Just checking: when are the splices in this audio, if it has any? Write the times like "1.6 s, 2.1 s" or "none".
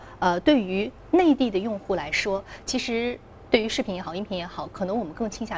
none